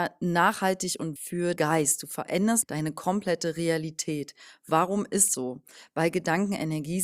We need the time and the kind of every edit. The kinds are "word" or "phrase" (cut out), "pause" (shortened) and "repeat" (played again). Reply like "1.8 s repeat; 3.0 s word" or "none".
1.2 s word; 1.6 s word; 2.6 s word; 5.3 s word